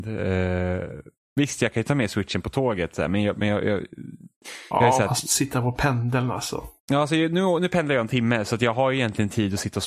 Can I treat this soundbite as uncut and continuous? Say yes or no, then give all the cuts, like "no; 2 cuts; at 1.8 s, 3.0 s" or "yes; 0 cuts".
yes; 0 cuts